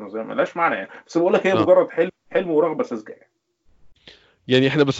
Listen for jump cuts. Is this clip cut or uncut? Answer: uncut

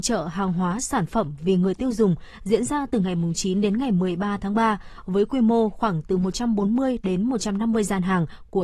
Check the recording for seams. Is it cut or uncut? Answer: uncut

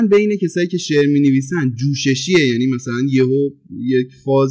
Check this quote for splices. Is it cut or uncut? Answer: uncut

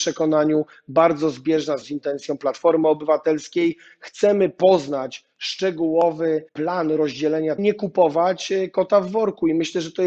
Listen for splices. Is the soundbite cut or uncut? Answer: cut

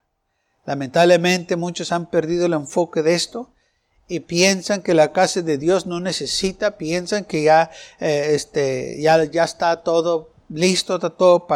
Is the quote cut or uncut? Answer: uncut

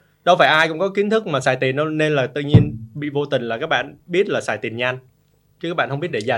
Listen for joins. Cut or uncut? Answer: uncut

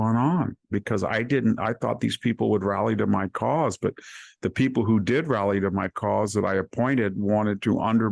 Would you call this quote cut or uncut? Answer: uncut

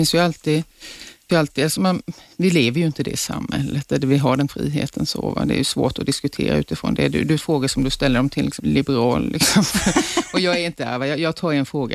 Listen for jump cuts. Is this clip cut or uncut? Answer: cut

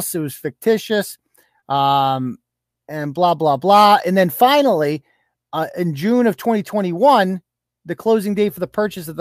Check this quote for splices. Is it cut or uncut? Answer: uncut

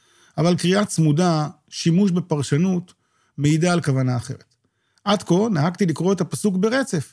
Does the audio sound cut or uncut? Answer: uncut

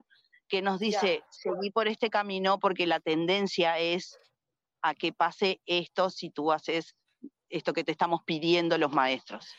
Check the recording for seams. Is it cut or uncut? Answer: uncut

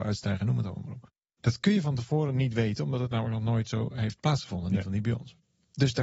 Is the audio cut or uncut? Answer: uncut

